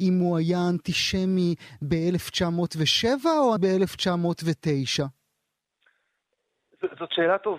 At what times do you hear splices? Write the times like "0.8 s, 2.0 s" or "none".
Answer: 3.6 s

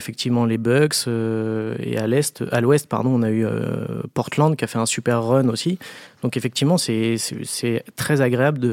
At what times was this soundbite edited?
none

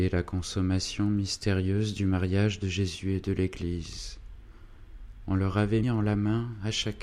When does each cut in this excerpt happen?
5.8 s

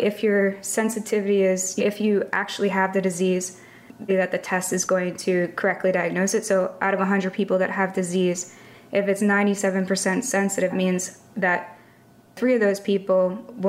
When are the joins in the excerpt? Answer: 1.8 s, 4.1 s, 10.7 s

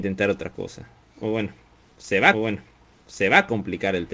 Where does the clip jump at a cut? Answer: 2.3 s

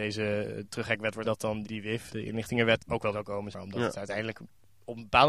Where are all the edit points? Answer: 1.2 s, 1.6 s, 2.1 s, 2.8 s, 3.1 s, 3.5 s

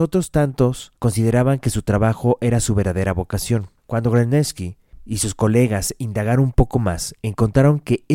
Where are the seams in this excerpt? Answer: 1.0 s, 3.8 s

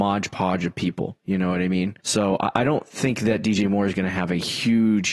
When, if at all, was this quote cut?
2.0 s

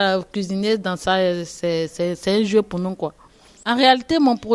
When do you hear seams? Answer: none

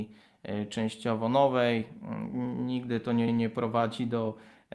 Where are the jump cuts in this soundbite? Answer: 3.3 s

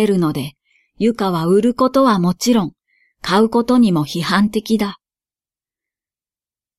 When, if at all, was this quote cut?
none

